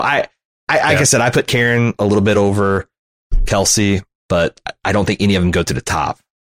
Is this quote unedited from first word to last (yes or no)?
yes